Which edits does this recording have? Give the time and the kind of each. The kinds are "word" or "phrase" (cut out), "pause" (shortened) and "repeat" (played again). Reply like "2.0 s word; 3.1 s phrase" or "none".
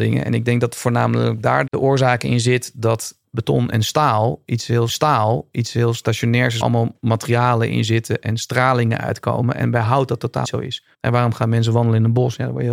1.7 s word; 3.2 s word; 4.9 s repeat; 6.6 s word; 10.4 s word; 10.9 s pause